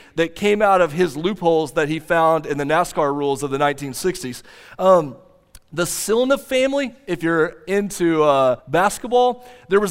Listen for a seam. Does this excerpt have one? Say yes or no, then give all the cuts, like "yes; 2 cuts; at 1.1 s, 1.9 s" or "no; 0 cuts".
yes; 1 cut; at 8.6 s